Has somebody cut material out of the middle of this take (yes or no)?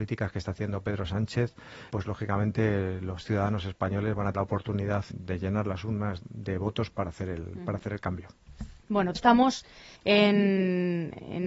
yes